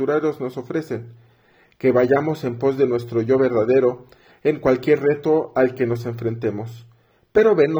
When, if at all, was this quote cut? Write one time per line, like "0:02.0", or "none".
none